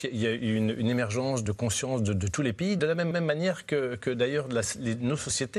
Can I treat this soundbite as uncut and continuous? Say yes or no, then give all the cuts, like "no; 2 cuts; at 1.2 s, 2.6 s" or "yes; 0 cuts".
no; 3 cuts; at 1.4 s, 2.8 s, 3.1 s